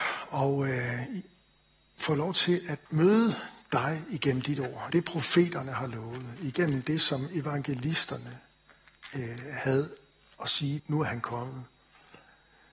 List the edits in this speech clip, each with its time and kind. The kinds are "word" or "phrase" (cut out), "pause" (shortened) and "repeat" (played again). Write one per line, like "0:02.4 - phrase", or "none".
0:02.9 - pause
0:04.9 - word
0:10.8 - word

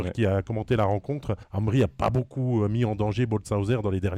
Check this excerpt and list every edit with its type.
0:01.4 - pause

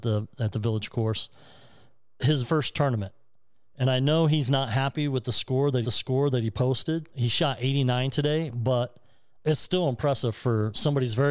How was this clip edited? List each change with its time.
0:02.4 - word
0:05.8 - repeat
0:07.1 - pause
0:09.4 - word

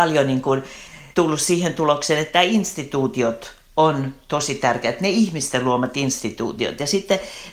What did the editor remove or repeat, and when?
0:01.1 - pause

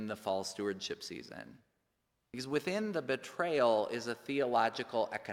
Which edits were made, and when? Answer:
none

